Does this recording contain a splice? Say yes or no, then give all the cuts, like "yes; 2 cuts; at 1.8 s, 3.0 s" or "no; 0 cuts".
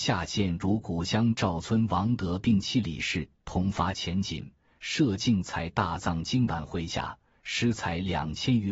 no; 0 cuts